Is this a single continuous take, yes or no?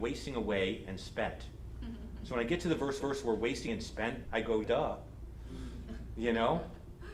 no